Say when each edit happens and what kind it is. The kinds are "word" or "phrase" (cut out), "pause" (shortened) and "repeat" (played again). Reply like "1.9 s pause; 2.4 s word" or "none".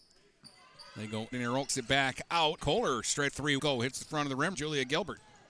1.3 s word; 1.7 s word; 2.6 s word; 3.3 s word; 3.6 s word; 4.5 s word